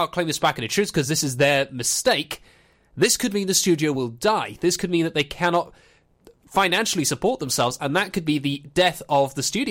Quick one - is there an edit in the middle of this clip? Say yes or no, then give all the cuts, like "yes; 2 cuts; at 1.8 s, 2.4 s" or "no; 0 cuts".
no; 0 cuts